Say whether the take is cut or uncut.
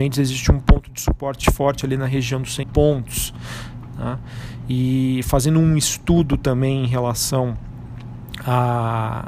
cut